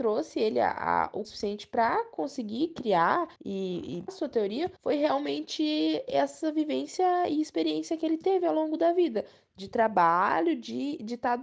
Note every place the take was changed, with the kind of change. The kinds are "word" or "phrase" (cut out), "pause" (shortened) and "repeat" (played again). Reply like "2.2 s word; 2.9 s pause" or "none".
1.2 s word; 3.4 s pause; 4.1 s word; 4.8 s pause